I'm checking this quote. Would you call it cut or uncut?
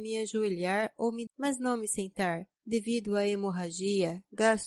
cut